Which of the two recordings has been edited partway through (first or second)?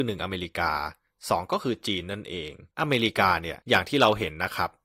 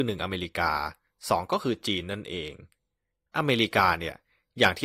first